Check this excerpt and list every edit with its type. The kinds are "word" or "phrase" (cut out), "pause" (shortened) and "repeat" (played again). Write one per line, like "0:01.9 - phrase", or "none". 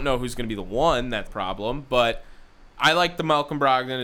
0:01.3 - word
0:02.7 - pause